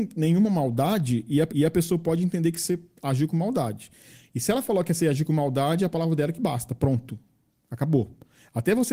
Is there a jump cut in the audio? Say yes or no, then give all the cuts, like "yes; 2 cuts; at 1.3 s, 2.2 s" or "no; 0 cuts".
yes; 1 cut; at 1.5 s